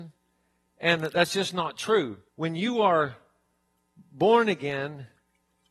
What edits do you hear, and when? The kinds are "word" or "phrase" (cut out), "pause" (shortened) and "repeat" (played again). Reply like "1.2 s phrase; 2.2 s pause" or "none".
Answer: 2.3 s pause